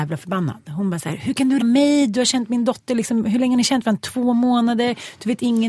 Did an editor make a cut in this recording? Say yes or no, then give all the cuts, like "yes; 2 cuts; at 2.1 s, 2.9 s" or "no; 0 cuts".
yes; 1 cut; at 1.6 s